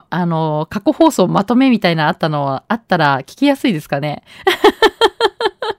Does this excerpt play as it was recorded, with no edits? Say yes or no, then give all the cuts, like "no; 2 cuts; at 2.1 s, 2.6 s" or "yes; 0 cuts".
yes; 0 cuts